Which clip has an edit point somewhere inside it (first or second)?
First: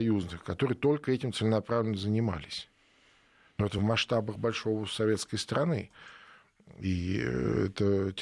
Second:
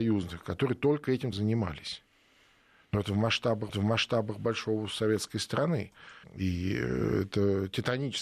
second